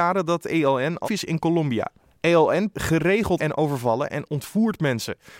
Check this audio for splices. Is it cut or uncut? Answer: cut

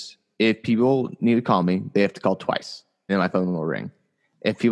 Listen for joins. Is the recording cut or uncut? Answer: cut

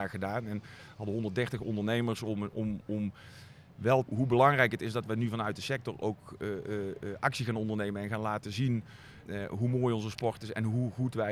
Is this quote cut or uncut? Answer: cut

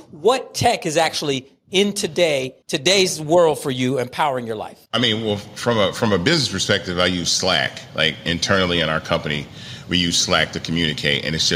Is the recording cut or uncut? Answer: cut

